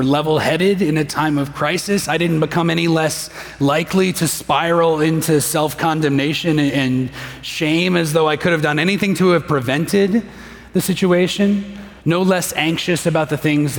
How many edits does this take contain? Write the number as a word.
one